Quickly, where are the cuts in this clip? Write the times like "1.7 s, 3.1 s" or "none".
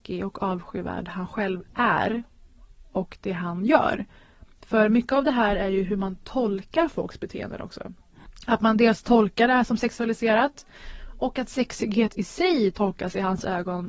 none